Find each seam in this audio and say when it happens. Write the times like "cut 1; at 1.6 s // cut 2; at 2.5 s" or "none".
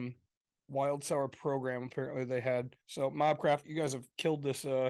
cut 1; at 2.8 s // cut 2; at 3.6 s